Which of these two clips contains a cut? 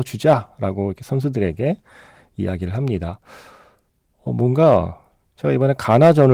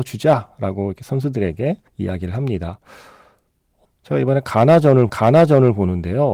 second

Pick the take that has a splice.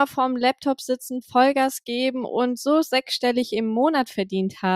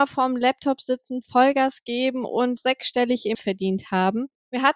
second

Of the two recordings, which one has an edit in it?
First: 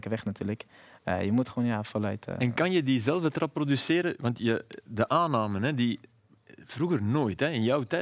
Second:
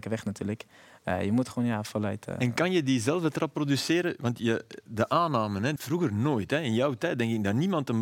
second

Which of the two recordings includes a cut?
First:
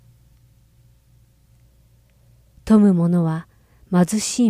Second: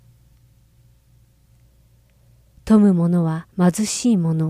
second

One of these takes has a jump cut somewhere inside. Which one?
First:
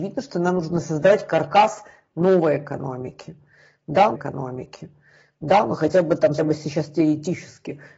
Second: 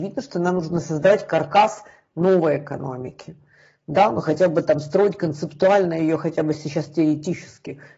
first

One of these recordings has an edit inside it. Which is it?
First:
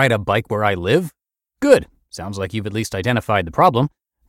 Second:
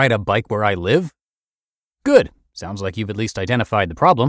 first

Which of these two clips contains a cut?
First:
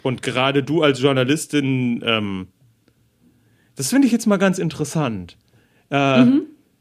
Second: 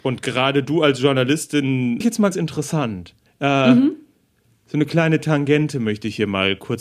second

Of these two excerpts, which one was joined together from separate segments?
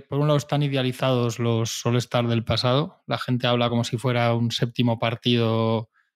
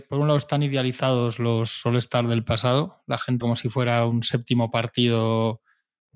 second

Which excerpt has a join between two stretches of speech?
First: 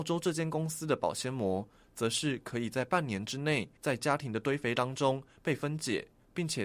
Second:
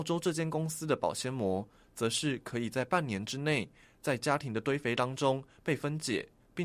first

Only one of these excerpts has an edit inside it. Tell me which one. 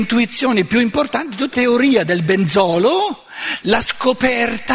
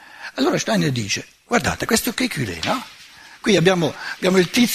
first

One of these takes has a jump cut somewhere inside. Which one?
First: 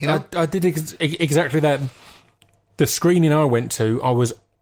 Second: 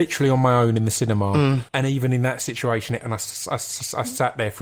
second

